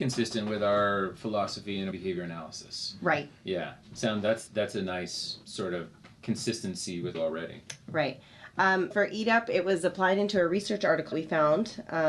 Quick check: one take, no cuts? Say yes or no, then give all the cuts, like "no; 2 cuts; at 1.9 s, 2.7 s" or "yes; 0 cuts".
no; 6 cuts; at 1.9 s, 4.5 s, 5.4 s, 7.1 s, 8.9 s, 11.1 s